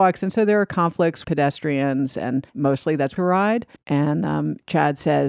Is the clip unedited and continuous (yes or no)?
no